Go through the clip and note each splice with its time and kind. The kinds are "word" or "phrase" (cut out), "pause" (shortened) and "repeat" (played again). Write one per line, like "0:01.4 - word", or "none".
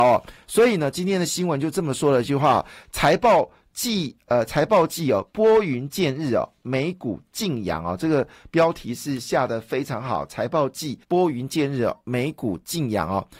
0:11.0 - pause